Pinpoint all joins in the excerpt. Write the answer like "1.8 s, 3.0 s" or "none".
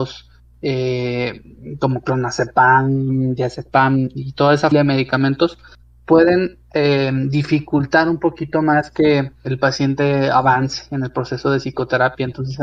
4.7 s, 9.4 s